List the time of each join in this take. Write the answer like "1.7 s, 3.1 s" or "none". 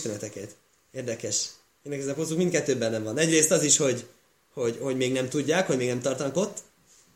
none